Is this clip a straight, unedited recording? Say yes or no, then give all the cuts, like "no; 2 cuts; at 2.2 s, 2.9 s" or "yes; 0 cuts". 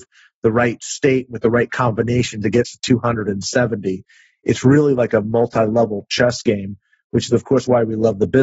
yes; 0 cuts